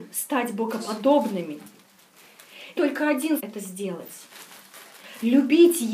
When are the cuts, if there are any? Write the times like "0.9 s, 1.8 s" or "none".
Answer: 2.8 s, 3.4 s